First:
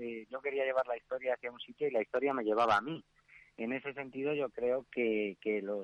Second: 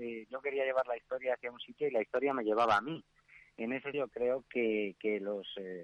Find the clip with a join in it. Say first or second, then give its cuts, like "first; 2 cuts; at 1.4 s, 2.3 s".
second; 1 cut; at 3.9 s